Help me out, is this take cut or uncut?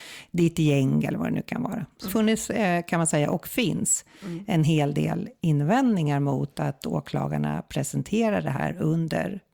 cut